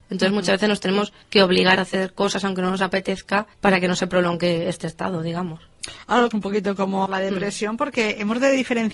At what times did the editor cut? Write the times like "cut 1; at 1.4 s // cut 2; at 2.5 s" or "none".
cut 1; at 1.2 s // cut 2; at 1.8 s // cut 3; at 3.5 s // cut 4; at 6.3 s // cut 5; at 7.1 s